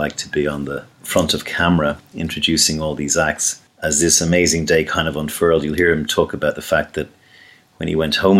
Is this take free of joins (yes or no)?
yes